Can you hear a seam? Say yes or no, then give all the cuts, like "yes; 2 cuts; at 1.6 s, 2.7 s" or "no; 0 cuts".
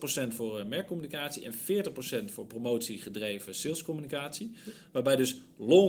no; 0 cuts